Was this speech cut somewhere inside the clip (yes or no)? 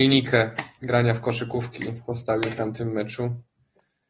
no